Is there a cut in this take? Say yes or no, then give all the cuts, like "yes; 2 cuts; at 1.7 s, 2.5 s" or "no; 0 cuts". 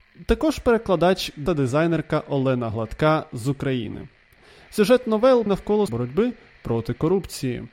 yes; 3 cuts; at 1.5 s, 5.5 s, 5.9 s